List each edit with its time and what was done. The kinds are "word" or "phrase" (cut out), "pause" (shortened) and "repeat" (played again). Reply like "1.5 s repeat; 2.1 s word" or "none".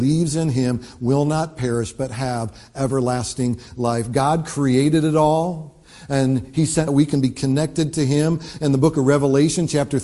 6.9 s phrase